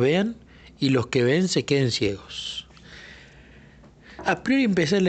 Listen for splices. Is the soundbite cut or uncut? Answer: uncut